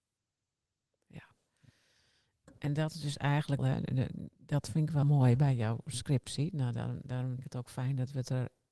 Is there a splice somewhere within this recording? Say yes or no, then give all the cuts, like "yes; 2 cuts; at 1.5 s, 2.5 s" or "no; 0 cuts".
yes; 4 cuts; at 3.6 s, 4.3 s, 5.0 s, 7.4 s